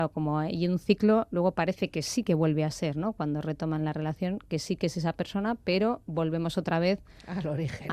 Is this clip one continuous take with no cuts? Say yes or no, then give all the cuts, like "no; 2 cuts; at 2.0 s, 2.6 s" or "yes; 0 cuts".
yes; 0 cuts